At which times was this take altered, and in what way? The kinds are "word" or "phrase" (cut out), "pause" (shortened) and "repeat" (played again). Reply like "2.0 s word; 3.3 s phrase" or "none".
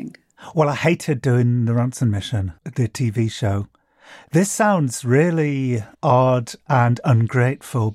2.6 s pause; 5.9 s pause

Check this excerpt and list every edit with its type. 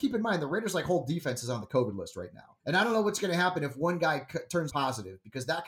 2.6 s pause; 4.7 s word

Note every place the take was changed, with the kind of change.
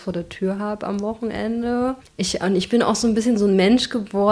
2.0 s pause

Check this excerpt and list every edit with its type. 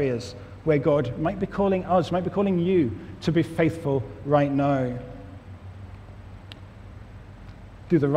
none

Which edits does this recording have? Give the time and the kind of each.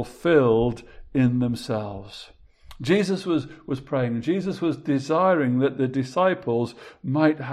none

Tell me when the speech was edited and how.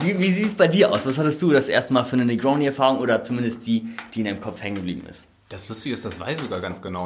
none

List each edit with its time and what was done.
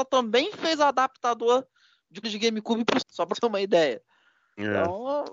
2.2 s word; 3.0 s word; 3.3 s word

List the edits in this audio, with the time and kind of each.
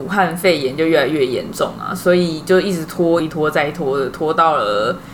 3.2 s phrase

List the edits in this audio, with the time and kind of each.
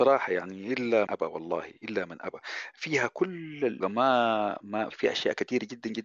1.1 s word; 3.8 s phrase; 4.9 s word

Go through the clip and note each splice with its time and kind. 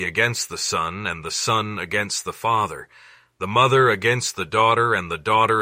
none

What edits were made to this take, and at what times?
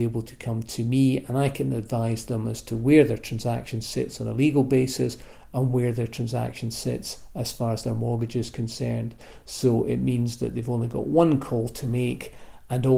none

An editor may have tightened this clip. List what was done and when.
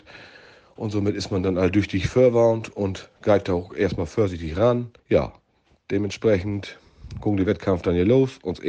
5.0 s pause

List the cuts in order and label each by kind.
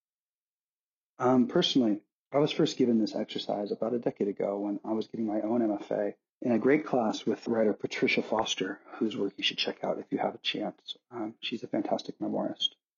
2.1 s pause; 6.3 s pause; 7.5 s word

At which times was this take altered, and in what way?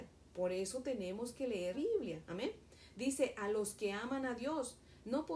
1.7 s word

